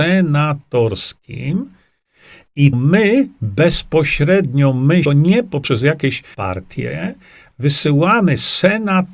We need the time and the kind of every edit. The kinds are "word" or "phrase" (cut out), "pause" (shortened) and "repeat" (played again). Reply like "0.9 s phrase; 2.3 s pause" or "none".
2.7 s word; 5.0 s word; 6.3 s word